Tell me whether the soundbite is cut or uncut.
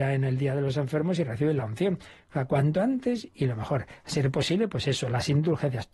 uncut